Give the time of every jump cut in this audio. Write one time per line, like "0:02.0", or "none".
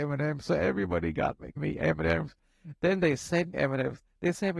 0:01.6
0:03.5